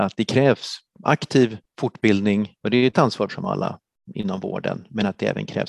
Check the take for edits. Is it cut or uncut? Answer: cut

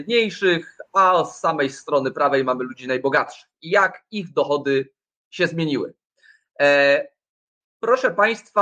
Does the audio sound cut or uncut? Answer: uncut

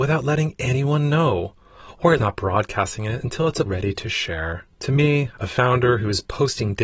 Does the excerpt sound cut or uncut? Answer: cut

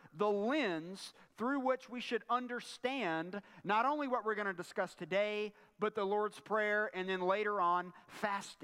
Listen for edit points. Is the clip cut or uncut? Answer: uncut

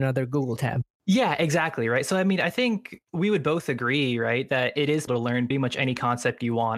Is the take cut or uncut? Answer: cut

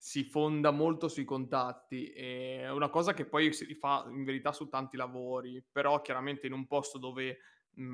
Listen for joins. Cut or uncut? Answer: uncut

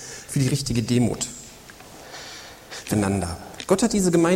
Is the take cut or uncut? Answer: cut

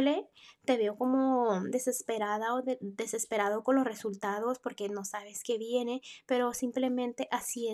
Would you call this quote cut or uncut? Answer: uncut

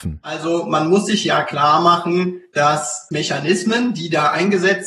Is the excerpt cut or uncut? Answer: cut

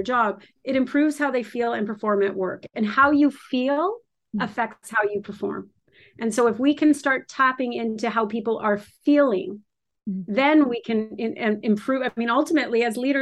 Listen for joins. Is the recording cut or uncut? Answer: uncut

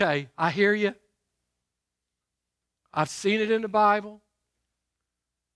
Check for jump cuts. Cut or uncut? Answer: uncut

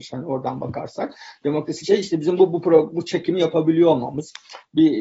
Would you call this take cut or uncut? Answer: cut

